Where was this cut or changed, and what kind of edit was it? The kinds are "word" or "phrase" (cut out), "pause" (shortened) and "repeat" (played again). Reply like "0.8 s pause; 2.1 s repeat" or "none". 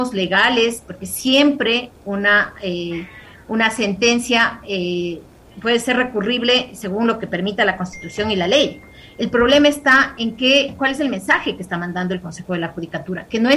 none